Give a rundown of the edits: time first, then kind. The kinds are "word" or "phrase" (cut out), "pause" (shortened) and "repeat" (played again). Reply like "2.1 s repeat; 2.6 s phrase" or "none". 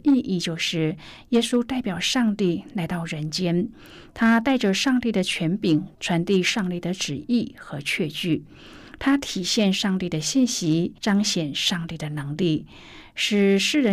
5.9 s pause; 11.0 s pause